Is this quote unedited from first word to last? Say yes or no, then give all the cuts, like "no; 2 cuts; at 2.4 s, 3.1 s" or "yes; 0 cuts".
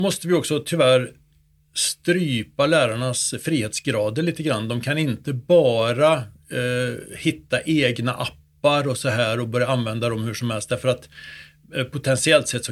yes; 0 cuts